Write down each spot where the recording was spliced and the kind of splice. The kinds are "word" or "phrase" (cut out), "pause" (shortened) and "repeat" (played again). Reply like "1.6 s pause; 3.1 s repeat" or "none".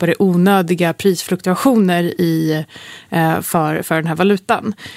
none